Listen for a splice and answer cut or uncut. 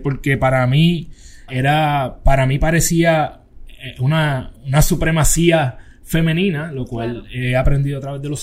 cut